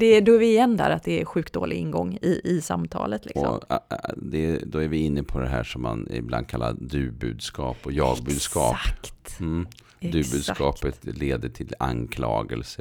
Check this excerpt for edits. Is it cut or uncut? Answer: uncut